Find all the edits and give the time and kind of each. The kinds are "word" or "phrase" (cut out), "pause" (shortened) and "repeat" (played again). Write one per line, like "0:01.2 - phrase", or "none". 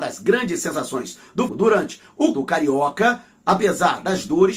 0:01.5 - word
0:02.3 - word